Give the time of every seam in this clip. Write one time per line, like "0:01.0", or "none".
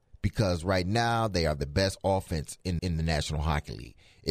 0:02.8